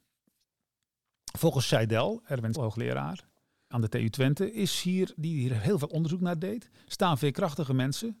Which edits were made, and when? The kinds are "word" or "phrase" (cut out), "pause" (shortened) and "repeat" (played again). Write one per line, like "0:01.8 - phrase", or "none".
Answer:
0:02.5 - word
0:03.7 - word
0:05.2 - word